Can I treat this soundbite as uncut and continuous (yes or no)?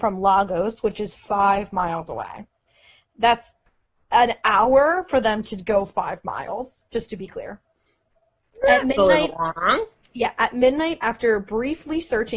yes